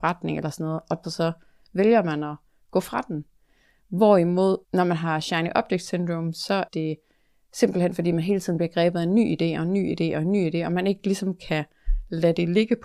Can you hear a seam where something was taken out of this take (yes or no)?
yes